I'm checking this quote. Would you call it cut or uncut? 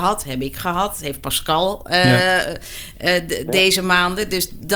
uncut